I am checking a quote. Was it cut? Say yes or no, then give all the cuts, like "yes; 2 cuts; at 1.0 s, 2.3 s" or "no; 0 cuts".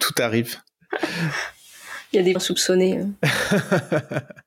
yes; 1 cut; at 2.3 s